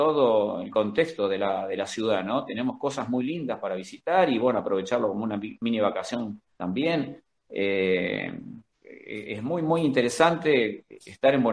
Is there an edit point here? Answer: yes; 3 cuts; at 3.6 s, 6.5 s, 8.7 s

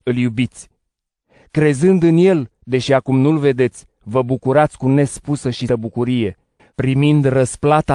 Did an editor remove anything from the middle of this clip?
yes; 4 cuts; at 2.5 s, 3.9 s, 5.7 s, 6.6 s

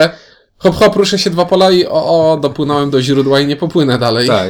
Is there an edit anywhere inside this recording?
no; 0 cuts

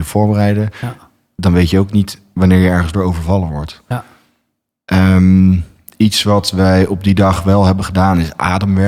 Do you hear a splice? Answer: no; 0 cuts

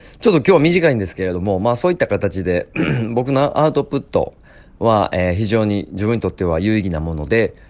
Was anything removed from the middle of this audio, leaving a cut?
no; 0 cuts

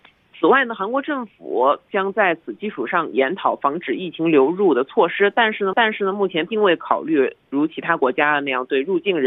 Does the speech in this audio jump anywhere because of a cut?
yes; 1 cut; at 5.7 s

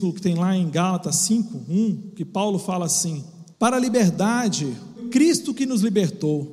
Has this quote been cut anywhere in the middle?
yes; 2 cuts; at 3.5 s, 5.0 s

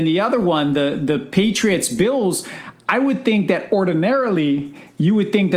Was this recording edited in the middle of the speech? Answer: no; 0 cuts

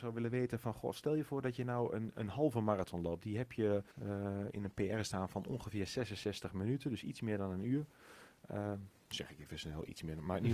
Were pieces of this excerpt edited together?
yes; 1 cut; at 3.9 s

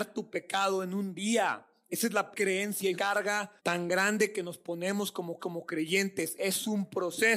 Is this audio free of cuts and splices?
no; 4 cuts; at 2.3 s, 2.9 s, 3.6 s, 5.4 s

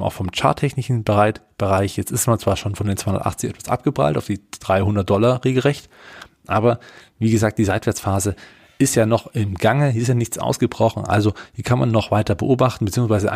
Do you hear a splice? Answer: no; 0 cuts

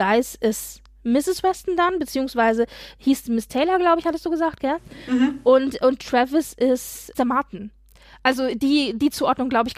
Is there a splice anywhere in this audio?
no; 0 cuts

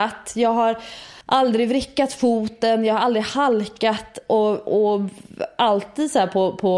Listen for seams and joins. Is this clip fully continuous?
no; 1 cut; at 1.2 s

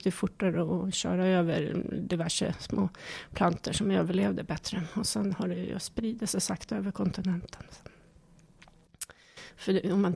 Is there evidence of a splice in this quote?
no; 0 cuts

